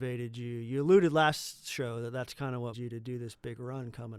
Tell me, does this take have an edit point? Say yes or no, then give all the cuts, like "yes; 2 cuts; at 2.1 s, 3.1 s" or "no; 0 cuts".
yes; 1 cut; at 2.7 s